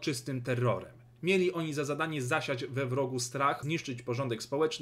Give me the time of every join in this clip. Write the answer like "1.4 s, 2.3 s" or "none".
3.6 s